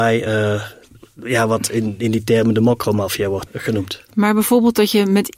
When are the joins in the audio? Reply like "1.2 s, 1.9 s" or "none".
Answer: 3.5 s